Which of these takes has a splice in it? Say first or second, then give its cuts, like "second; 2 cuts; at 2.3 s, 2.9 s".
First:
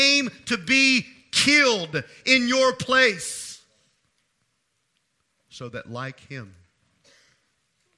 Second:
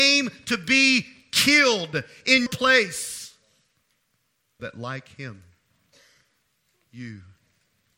second; 2 cuts; at 2.5 s, 4.6 s